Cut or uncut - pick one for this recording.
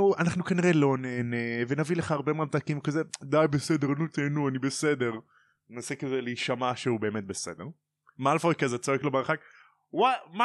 uncut